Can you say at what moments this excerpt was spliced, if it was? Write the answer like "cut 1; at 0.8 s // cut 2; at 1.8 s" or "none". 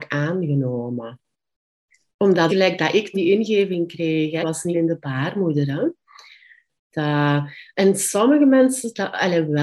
cut 1; at 2.5 s // cut 2; at 3.1 s // cut 3; at 4.4 s // cut 4; at 4.7 s